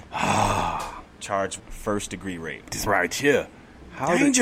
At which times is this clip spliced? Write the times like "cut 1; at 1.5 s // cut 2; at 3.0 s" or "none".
cut 1; at 1.6 s // cut 2; at 2.9 s